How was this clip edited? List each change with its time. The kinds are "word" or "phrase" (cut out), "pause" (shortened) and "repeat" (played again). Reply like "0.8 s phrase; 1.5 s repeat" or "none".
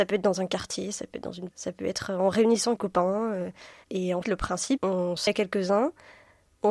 1.5 s word; 2.8 s word; 4.2 s word; 4.8 s word; 5.3 s word